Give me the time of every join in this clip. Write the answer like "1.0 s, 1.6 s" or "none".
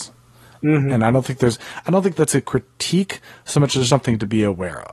3.9 s